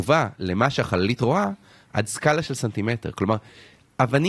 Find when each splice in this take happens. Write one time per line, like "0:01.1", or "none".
none